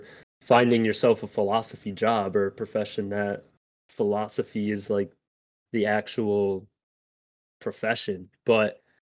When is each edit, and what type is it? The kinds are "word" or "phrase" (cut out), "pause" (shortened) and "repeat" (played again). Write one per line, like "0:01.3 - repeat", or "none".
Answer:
none